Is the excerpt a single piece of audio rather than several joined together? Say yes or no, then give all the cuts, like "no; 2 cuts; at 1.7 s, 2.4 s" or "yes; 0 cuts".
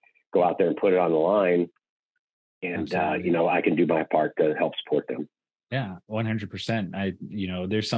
yes; 0 cuts